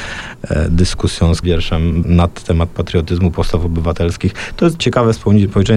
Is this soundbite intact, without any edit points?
no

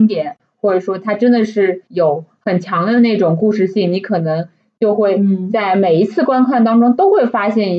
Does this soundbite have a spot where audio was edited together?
yes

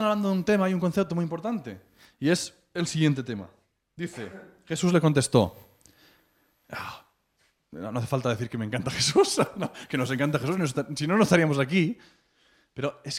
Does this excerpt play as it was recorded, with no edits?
yes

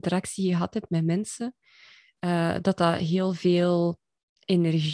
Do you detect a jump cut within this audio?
no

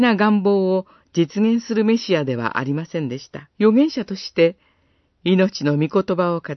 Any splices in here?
yes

